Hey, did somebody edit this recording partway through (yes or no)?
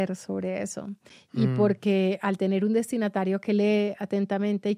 no